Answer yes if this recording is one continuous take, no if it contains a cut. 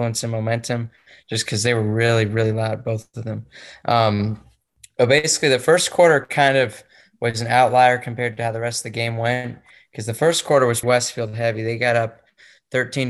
no